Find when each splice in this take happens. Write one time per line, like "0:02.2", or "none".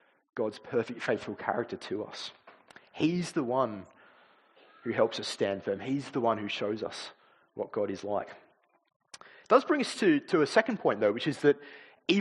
none